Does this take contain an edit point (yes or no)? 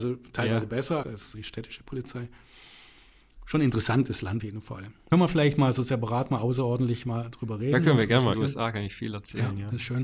yes